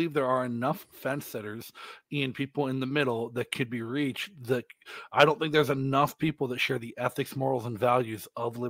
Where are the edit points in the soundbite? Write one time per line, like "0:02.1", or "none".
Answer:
none